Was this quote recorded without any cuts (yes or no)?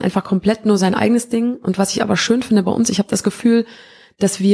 yes